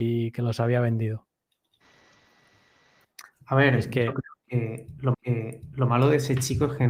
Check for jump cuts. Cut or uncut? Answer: cut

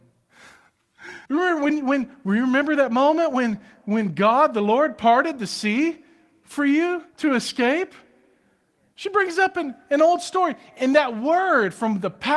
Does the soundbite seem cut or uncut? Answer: cut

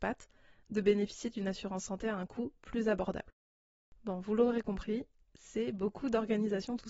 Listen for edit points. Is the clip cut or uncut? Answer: uncut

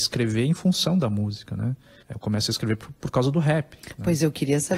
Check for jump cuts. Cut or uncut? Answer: uncut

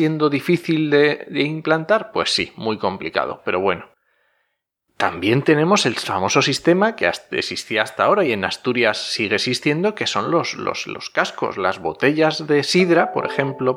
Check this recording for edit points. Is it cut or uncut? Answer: uncut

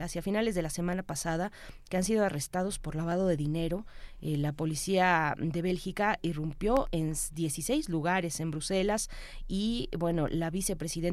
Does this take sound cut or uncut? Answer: uncut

